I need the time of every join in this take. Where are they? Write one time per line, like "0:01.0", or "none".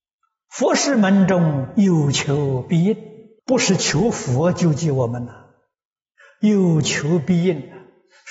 0:03.4